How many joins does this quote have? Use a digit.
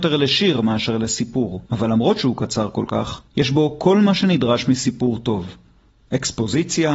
2